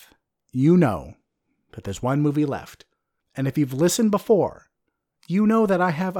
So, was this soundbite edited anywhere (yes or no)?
no